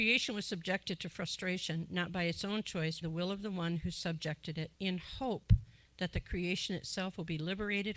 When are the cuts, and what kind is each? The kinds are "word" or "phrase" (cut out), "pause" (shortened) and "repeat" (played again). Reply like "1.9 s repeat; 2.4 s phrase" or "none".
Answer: 3.0 s phrase; 4.7 s pause